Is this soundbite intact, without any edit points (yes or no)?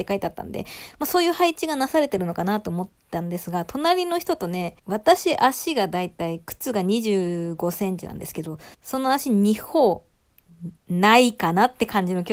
no